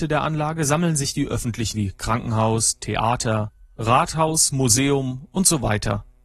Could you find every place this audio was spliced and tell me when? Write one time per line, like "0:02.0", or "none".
0:01.7